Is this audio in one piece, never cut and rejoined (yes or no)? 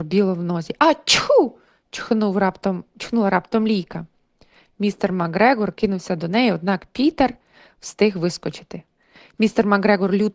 yes